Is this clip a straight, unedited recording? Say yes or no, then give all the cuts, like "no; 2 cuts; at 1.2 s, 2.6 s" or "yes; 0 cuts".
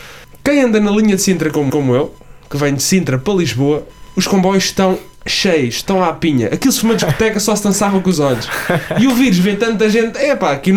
no; 2 cuts; at 1.7 s, 6.8 s